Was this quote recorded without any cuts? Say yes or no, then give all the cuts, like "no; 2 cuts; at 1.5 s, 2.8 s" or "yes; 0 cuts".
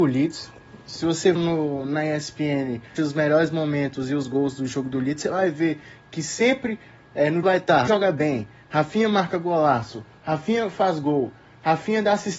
no; 4 cuts; at 1.3 s, 3.0 s, 7.4 s, 7.9 s